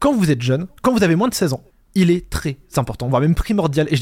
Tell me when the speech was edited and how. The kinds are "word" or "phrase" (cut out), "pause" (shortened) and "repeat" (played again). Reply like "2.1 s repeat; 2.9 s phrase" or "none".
1.7 s pause